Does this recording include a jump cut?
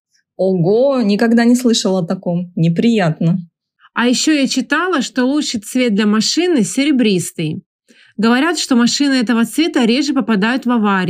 no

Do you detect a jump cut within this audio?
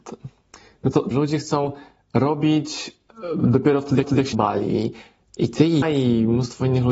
yes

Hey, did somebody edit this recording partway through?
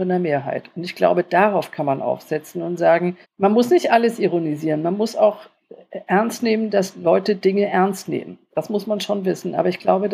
yes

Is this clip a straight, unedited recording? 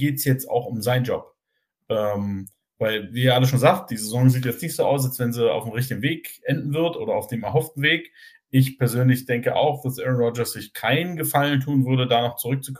yes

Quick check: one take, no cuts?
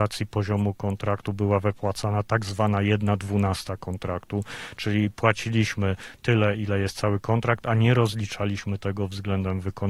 yes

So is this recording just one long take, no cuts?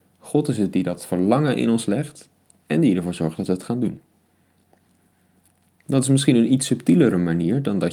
yes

